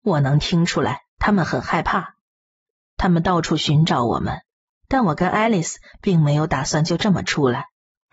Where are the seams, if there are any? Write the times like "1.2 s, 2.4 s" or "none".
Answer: none